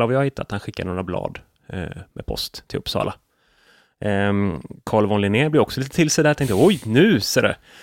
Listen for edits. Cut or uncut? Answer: uncut